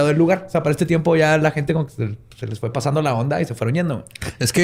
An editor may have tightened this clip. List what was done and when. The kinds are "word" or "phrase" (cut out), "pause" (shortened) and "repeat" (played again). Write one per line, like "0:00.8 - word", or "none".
none